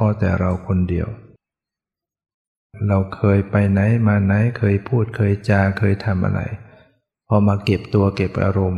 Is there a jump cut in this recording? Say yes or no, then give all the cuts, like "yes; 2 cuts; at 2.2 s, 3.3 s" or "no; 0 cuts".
no; 0 cuts